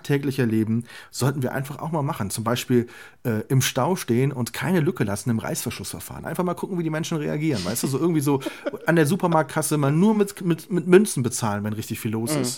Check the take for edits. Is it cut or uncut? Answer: uncut